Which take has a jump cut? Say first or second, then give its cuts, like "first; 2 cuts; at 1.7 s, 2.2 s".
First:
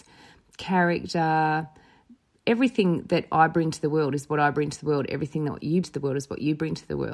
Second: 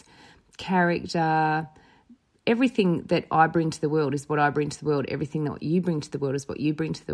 first; 1 cut; at 5.8 s